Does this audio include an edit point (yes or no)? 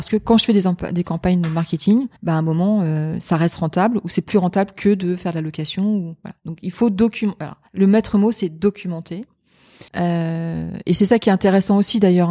yes